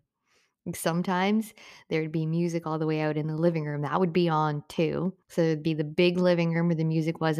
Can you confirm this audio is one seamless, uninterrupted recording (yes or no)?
no